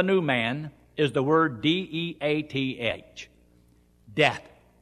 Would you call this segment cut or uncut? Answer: uncut